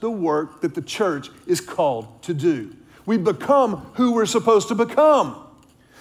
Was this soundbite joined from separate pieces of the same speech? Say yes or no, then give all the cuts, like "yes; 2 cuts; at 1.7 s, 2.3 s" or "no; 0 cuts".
no; 0 cuts